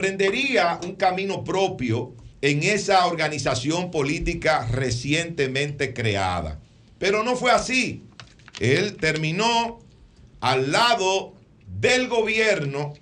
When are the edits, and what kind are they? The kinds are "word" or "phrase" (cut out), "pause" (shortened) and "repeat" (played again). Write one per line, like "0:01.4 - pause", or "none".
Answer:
0:02.3 - pause